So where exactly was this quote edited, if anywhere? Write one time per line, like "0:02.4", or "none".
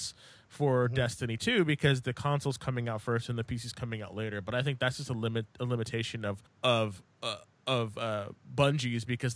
0:06.5